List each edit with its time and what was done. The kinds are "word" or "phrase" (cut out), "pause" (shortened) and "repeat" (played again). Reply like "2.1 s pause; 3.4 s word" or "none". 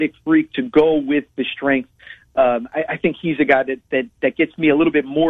none